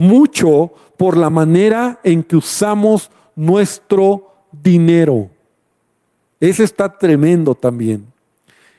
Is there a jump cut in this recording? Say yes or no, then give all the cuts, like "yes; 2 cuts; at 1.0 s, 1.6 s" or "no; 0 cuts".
no; 0 cuts